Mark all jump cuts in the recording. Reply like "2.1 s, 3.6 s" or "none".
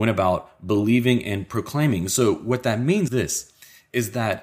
3.1 s